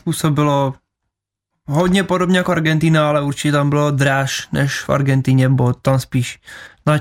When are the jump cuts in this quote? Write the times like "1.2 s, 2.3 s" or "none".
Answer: none